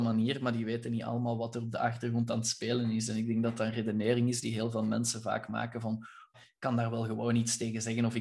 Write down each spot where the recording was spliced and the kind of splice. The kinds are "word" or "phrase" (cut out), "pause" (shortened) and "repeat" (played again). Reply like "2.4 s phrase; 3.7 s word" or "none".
6.3 s word